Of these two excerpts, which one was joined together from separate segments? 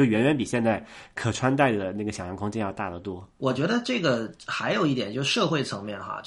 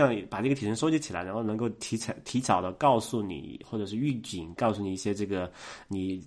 first; 1 cut; at 3.3 s

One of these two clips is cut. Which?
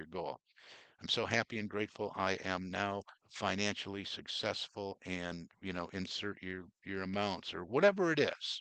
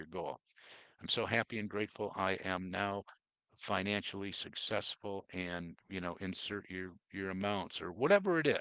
first; 1 cut; at 3.2 s

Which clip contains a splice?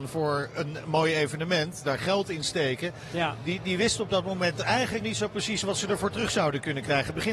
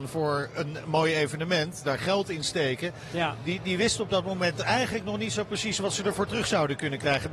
first; 1 cut; at 5.0 s

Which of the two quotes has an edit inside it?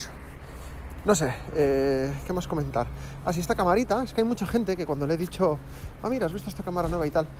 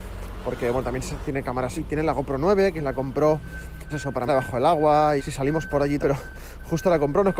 second; 7 cuts; at 1.2 s, 1.8 s, 2.8 s, 3.9 s, 4.3 s, 5.2 s, 6.0 s

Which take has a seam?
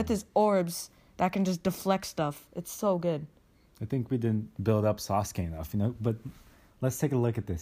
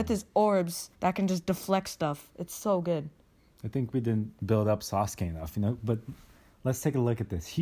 second; 1 cut; at 0.9 s

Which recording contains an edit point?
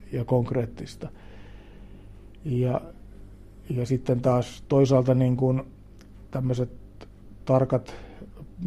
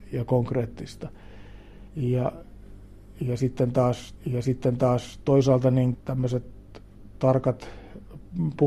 second; 3 cuts; at 1.9 s, 4.2 s, 5.9 s

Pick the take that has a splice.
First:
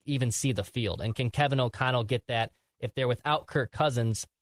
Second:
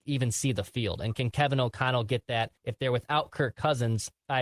second; 1 cut; at 2.6 s

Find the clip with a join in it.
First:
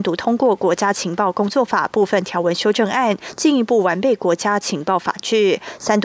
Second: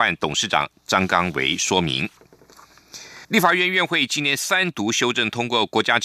second; 1 cut; at 3.2 s

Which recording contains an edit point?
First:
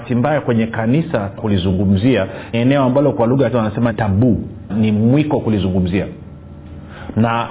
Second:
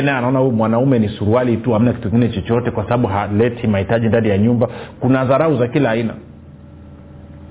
first; 5 cuts; at 1.4 s, 2.5 s, 3.5 s, 3.9 s, 4.7 s

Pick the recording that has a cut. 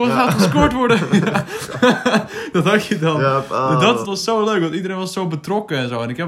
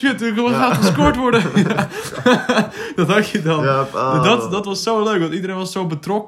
first; 1 cut; at 4.0 s

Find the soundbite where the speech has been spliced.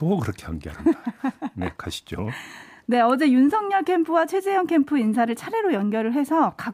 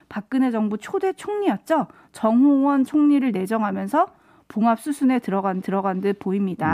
second; 2 cuts; at 2.9 s, 5.6 s

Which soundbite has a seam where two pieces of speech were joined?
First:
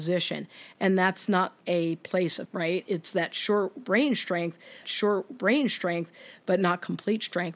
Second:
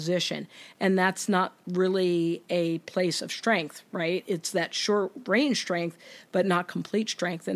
first; 3 cuts; at 1.6 s, 2.4 s, 4.8 s

